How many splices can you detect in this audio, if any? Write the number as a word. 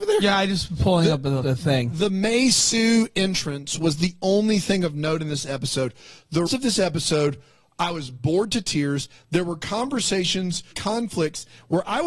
three